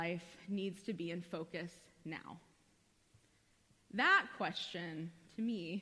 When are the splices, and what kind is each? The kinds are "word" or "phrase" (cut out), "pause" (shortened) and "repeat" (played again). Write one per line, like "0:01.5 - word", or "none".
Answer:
none